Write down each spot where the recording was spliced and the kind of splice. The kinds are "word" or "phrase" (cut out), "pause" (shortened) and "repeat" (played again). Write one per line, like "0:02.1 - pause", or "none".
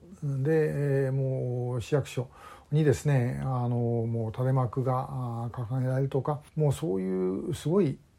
0:06.5 - pause